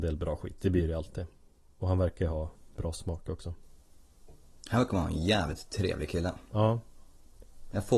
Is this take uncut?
yes; 0 cuts

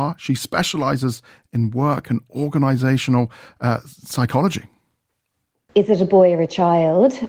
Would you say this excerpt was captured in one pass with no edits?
yes; 0 cuts

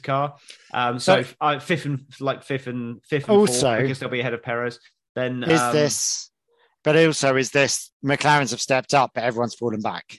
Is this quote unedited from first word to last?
no; 1 cut; at 7.9 s

